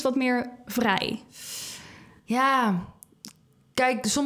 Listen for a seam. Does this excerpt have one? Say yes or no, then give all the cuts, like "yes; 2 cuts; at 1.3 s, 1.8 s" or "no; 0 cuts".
no; 0 cuts